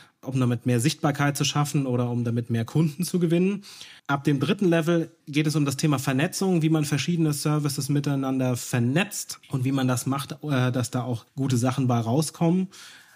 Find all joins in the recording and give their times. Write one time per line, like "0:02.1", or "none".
0:04.0
0:05.2